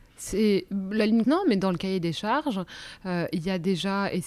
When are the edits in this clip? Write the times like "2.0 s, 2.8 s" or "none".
1.2 s